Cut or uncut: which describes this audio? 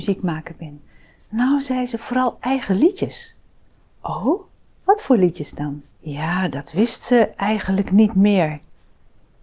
cut